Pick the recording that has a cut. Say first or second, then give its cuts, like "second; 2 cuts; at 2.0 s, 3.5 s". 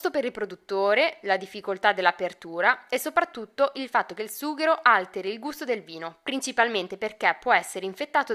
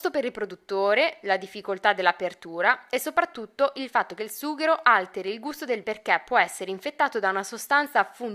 second; 1 cut; at 5.8 s